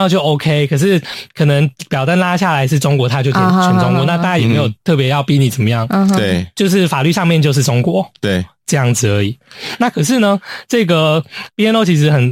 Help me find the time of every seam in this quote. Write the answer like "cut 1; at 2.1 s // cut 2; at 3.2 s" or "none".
cut 1; at 4.8 s